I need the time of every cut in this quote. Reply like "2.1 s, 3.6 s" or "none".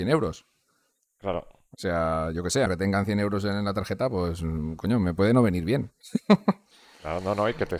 2.7 s

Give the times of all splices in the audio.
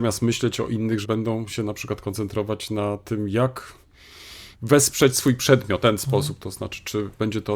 1.0 s, 4.5 s, 5.8 s

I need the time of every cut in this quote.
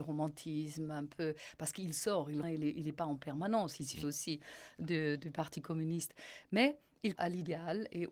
2.4 s, 4.0 s, 7.2 s

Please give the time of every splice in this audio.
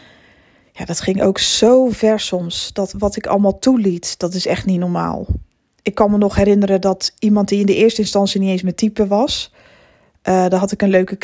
none

